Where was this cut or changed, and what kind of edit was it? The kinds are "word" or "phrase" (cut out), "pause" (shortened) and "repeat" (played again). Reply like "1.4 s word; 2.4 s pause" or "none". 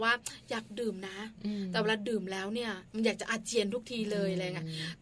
2.9 s pause